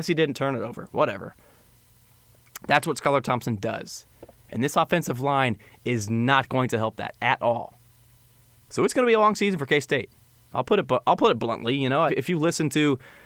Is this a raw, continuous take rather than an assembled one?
no; 1 cut; at 12.1 s

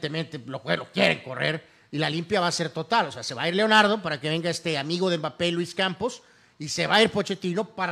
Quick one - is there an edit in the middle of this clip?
no; 0 cuts

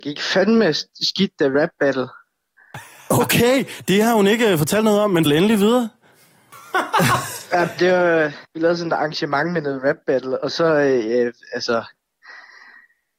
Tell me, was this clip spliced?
yes; 3 cuts; at 1.5 s, 5.3 s, 8.4 s

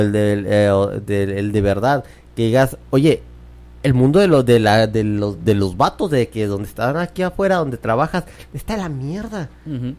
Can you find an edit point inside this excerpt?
no; 0 cuts

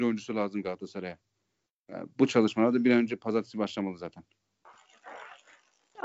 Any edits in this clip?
no; 0 cuts

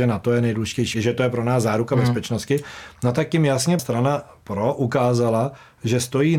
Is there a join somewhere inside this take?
yes; 2 cuts; at 0.9 s, 3.8 s

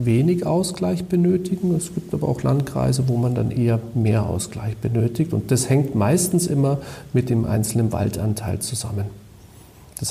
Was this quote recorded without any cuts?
yes; 0 cuts

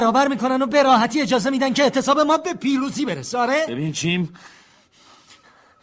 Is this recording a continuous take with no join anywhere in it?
yes; 0 cuts

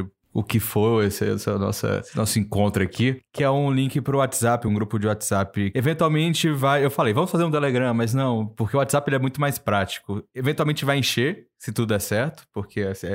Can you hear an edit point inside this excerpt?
no; 0 cuts

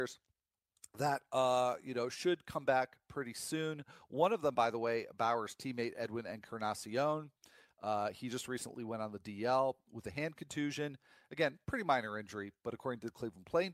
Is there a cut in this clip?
no; 0 cuts

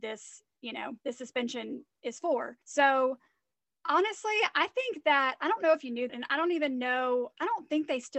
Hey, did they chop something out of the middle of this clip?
yes; 3 cuts; at 1.0 s, 2.6 s, 6.1 s

